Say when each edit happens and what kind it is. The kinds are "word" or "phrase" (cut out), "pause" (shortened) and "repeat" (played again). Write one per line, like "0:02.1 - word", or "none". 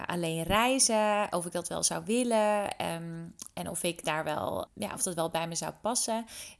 0:04.7 - word